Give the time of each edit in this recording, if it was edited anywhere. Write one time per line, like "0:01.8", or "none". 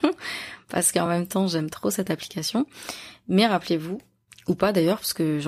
none